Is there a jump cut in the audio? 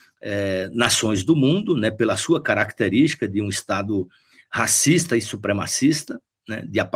no; 0 cuts

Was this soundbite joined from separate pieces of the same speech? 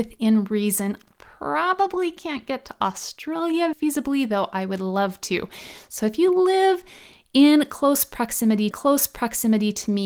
yes; 2 cuts; at 3.7 s, 8.7 s

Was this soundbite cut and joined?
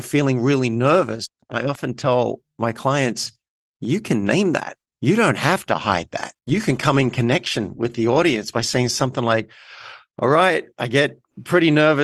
yes; 2 cuts; at 4.9 s, 6.4 s

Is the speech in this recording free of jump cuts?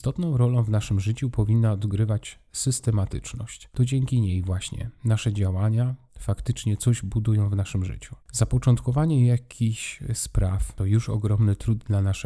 no; 1 cut; at 8.2 s

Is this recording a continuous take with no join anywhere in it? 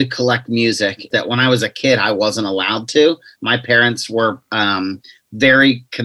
no; 1 cut; at 1.1 s

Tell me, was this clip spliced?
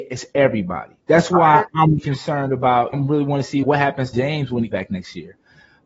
yes; 5 cuts; at 2.0 s, 2.9 s, 3.6 s, 4.1 s, 4.7 s

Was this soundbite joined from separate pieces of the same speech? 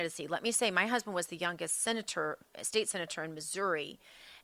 no; 0 cuts

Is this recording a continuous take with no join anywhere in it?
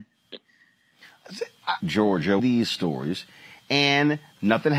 no; 2 cuts; at 1.8 s, 2.4 s

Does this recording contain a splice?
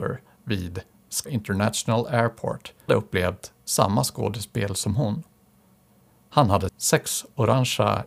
yes; 3 cuts; at 1.2 s, 2.9 s, 6.7 s

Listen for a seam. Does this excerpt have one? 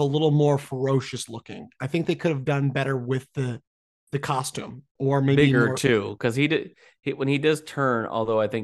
no; 0 cuts

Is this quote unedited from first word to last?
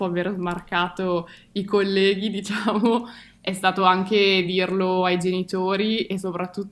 yes; 0 cuts

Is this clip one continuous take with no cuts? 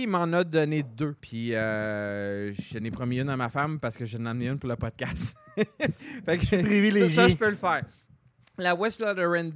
no; 1 cut; at 1.2 s

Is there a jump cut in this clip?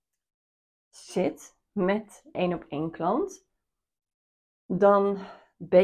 yes; 1 cut; at 2.3 s

